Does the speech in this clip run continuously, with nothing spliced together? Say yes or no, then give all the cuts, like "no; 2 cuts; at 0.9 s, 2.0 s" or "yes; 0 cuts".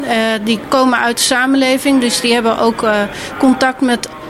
yes; 0 cuts